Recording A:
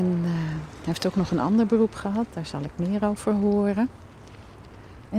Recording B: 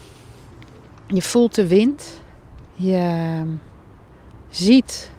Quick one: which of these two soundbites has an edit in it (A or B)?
B